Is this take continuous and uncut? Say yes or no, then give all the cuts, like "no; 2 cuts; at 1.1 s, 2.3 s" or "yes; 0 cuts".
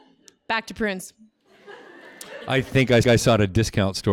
no; 2 cuts; at 2.7 s, 3.0 s